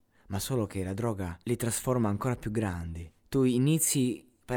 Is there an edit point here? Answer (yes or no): yes